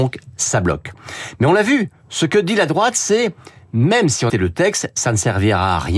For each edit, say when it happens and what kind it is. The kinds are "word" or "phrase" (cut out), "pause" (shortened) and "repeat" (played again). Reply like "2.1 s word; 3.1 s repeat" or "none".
4.3 s word

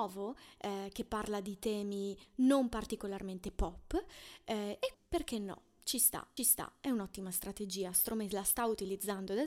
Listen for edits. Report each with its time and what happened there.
4.9 s word; 6.4 s repeat

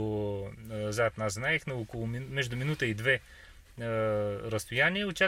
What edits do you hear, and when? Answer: none

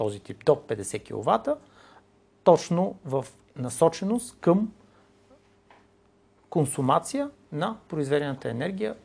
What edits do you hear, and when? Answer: none

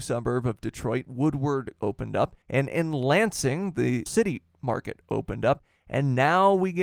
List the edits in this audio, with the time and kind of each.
1.8 s phrase; 2.4 s pause; 4.1 s phrase

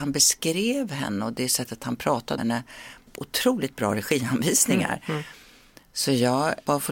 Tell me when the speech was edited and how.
2.4 s word; 3.1 s word

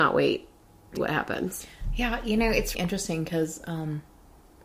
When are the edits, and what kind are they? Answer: 1.0 s word; 2.7 s word

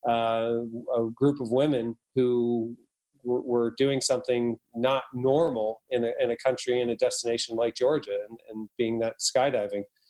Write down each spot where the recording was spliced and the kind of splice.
none

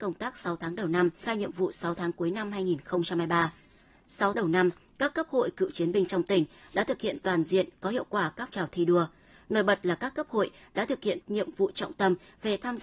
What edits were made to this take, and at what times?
1.2 s word; 4.3 s word; 8.5 s word; 11.2 s word

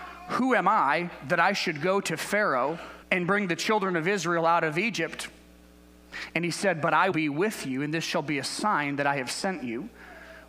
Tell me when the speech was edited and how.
3.0 s pause; 7.1 s word

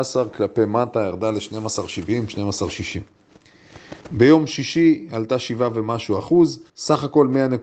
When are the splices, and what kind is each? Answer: 4.0 s pause; 6.7 s pause

